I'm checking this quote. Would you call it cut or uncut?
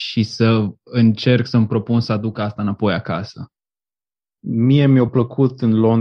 uncut